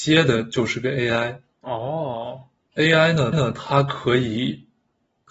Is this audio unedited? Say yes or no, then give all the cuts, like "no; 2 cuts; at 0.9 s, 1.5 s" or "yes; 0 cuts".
no; 1 cut; at 3.3 s